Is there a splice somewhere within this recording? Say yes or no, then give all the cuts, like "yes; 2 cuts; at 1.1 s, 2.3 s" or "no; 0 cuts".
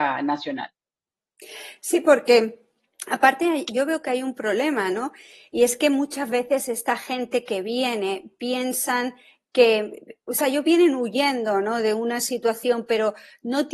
no; 0 cuts